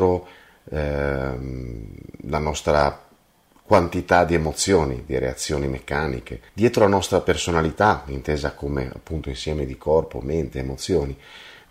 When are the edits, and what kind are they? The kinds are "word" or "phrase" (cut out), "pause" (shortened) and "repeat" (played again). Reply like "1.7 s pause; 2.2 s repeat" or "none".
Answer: 6.5 s pause